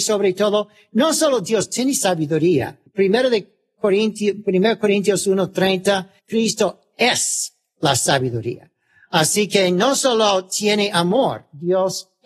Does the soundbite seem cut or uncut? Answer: cut